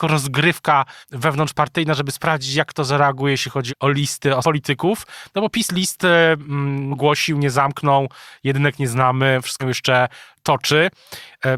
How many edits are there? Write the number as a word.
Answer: five